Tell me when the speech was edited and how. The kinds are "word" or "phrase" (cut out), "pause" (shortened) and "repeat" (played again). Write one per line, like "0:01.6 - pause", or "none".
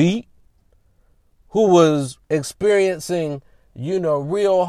none

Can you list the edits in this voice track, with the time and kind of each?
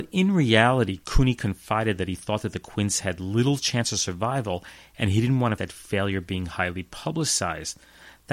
0:05.6 - word

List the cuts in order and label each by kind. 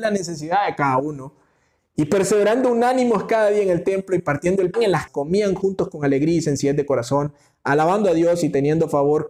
0:04.7 - word
0:05.1 - word

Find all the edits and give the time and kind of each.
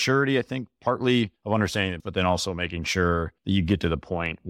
0:01.4 - pause
0:02.0 - word
0:03.4 - pause

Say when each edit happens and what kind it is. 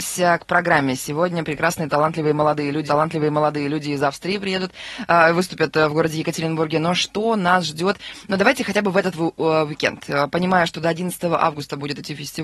0:02.9 - repeat

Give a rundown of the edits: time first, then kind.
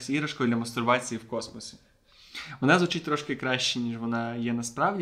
none

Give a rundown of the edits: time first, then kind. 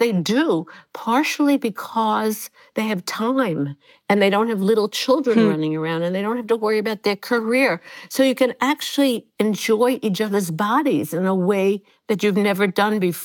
none

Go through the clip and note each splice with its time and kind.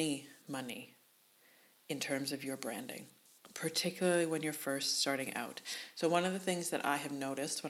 none

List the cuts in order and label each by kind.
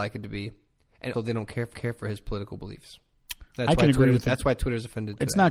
0:01.1 - word
0:01.7 - repeat
0:03.5 - pause

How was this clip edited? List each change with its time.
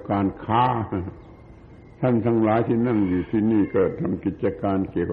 none

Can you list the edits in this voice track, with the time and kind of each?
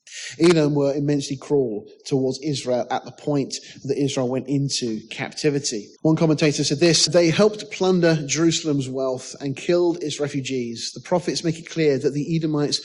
0:06.0 - pause
0:07.1 - word

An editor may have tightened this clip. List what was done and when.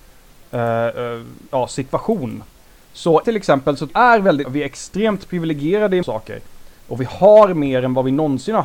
0:03.2 - word
0:03.9 - phrase
0:04.4 - word
0:06.0 - word
0:06.8 - pause

